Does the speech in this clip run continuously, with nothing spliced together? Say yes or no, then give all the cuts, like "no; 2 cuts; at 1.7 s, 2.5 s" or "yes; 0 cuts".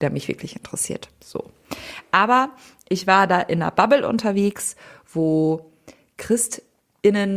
yes; 0 cuts